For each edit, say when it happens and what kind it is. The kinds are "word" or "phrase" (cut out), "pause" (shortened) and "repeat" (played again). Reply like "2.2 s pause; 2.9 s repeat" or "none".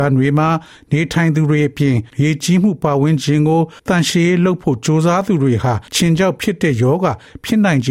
2.1 s pause; 3.8 s pause; 5.9 s pause